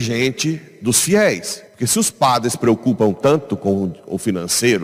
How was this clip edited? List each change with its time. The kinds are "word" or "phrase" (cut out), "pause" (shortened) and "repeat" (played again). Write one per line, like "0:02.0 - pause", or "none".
0:01.7 - pause